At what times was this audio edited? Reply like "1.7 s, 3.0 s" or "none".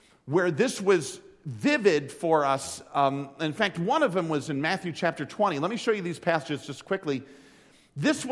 none